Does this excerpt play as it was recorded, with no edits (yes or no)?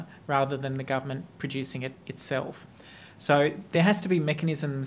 yes